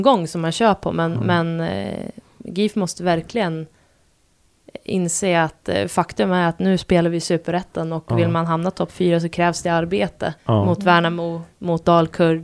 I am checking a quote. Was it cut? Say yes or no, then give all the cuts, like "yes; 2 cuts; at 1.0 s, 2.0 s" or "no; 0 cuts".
yes; 1 cut; at 10.4 s